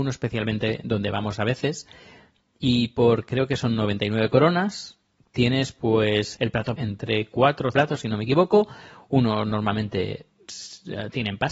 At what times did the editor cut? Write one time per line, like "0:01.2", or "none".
0:06.3
0:06.7
0:07.7